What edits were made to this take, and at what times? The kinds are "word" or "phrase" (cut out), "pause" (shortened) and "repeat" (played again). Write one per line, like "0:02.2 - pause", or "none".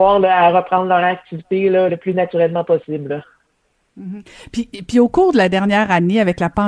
0:01.9 - word